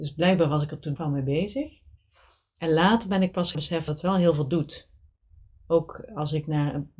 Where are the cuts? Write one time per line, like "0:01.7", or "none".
0:01.0
0:03.5
0:03.9